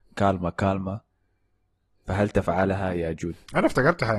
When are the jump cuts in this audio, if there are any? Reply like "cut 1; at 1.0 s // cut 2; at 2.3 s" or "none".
none

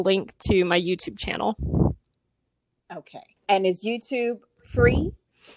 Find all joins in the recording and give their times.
cut 1; at 3.4 s

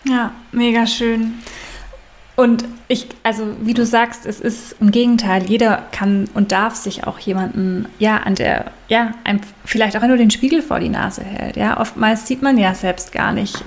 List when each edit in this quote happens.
cut 1; at 2.8 s // cut 2; at 4.8 s // cut 3; at 8.3 s // cut 4; at 10.0 s

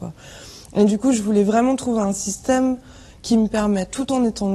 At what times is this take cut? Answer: none

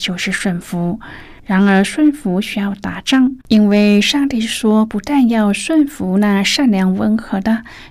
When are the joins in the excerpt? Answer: cut 1; at 1.4 s // cut 2; at 3.4 s

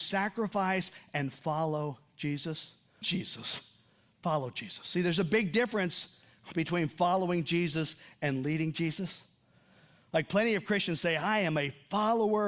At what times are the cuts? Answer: cut 1; at 3.0 s

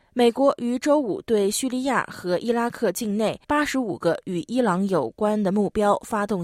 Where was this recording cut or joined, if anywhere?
cut 1; at 3.4 s

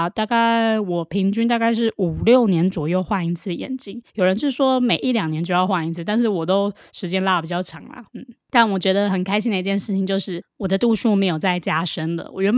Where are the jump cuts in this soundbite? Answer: cut 1; at 4.1 s // cut 2; at 8.1 s

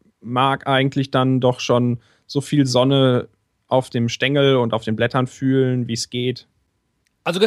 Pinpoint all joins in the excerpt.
none

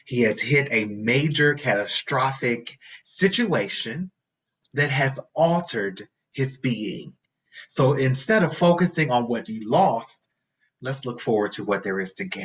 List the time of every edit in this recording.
none

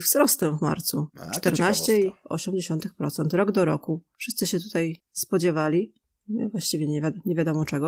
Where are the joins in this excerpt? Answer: cut 1; at 1.1 s

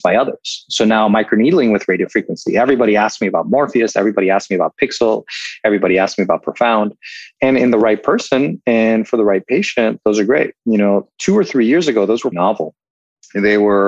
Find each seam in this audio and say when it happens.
cut 1; at 12.3 s

